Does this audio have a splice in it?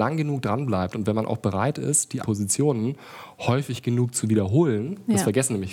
yes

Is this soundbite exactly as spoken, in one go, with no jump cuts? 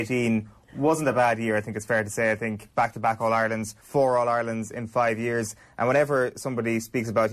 no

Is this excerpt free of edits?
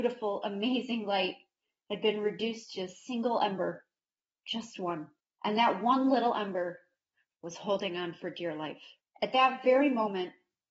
yes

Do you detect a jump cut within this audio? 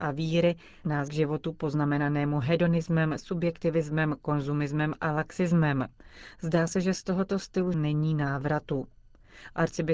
yes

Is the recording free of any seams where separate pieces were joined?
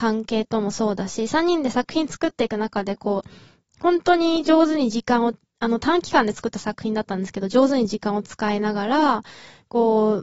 yes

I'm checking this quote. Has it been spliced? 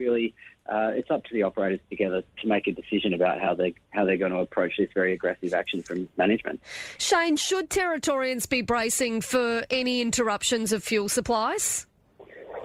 no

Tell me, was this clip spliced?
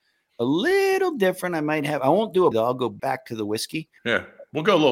yes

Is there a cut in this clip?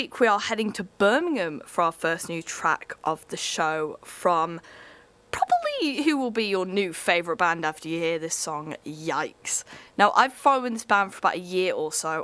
no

